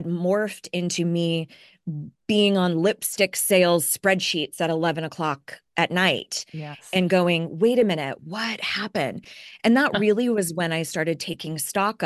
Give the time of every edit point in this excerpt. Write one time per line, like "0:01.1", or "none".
0:08.2